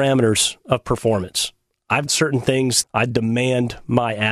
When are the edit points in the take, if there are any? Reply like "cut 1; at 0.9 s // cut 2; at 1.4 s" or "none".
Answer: cut 1; at 2.1 s // cut 2; at 2.8 s

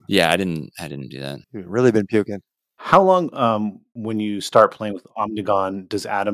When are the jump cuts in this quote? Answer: cut 1; at 1.4 s

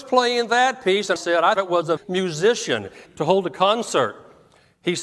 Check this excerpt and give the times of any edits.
cut 1; at 1.2 s // cut 2; at 1.6 s // cut 3; at 2.0 s // cut 4; at 3.1 s

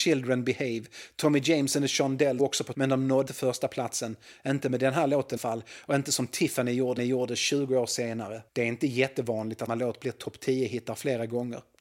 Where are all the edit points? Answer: cut 1; at 2.4 s // cut 2; at 2.7 s // cut 3; at 3.3 s // cut 4; at 5.4 s // cut 5; at 7.0 s // cut 6; at 8.5 s // cut 7; at 9.7 s

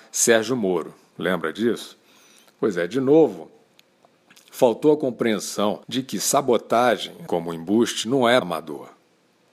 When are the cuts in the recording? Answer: cut 1; at 5.8 s // cut 2; at 7.3 s // cut 3; at 8.4 s

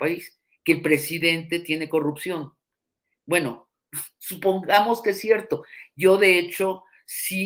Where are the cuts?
none

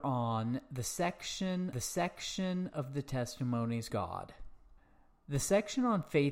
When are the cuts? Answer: cut 1; at 1.7 s // cut 2; at 3.9 s // cut 3; at 4.8 s

